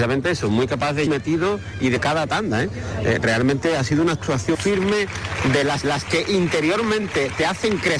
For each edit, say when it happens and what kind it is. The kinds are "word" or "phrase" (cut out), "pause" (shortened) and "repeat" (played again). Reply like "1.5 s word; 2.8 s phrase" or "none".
1.1 s phrase; 2.0 s phrase; 4.5 s word; 5.8 s repeat